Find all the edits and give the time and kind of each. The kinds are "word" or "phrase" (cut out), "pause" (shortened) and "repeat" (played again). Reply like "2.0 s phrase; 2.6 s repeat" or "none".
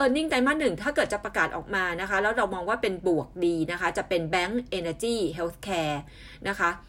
none